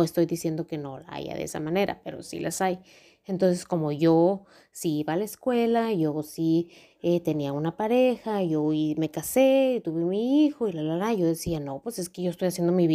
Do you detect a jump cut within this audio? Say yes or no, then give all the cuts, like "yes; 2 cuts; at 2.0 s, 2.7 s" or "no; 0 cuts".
no; 0 cuts